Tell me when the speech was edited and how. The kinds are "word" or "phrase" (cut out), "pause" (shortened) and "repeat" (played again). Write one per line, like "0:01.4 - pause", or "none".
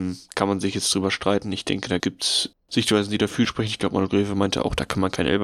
0:02.0 - word
0:02.6 - pause
0:03.4 - phrase